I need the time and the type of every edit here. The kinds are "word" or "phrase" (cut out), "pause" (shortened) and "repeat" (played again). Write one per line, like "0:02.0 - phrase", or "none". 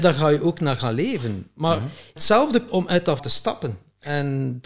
0:02.2 - word
0:02.7 - word
0:03.2 - word